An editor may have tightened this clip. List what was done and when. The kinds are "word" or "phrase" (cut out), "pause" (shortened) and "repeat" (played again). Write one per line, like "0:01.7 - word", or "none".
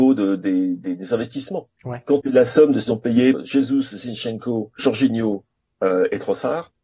0:02.2 - word
0:02.9 - word
0:03.3 - word
0:04.8 - word